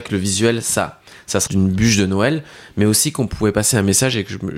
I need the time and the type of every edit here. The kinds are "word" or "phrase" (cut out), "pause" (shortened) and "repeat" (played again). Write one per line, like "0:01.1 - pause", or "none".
0:01.5 - word